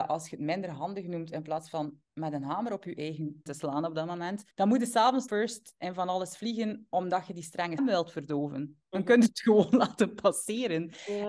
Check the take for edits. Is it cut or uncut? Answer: cut